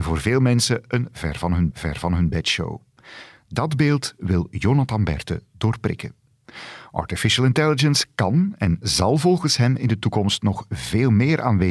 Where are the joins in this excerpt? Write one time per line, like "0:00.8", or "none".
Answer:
0:01.7